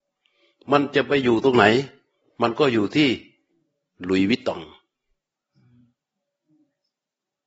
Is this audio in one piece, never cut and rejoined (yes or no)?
yes